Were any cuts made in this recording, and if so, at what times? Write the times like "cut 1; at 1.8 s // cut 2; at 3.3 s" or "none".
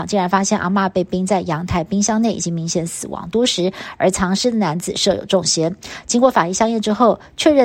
none